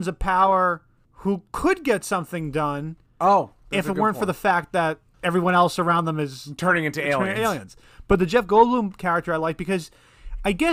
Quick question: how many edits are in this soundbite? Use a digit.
0